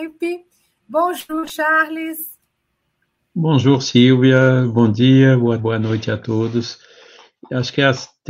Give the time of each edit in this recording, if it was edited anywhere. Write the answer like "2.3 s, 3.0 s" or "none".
5.6 s